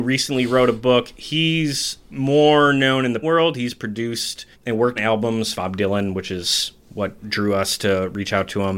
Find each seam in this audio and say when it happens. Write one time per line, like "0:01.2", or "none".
0:03.2
0:04.5
0:05.0
0:05.5
0:07.2